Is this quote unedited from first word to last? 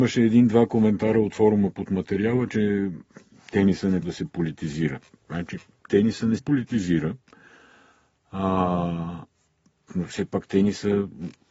no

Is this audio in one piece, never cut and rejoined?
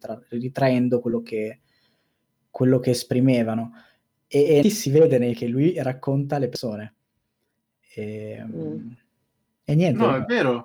no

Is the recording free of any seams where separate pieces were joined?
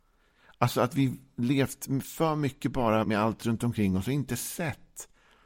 no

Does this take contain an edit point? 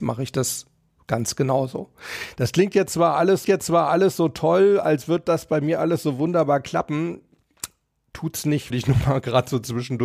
yes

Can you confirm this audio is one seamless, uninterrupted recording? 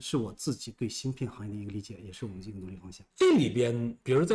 no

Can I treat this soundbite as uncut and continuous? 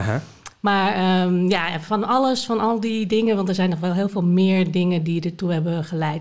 yes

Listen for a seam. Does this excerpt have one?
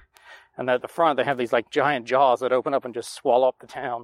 no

